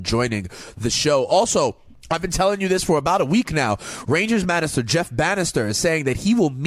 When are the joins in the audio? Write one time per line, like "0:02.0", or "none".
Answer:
none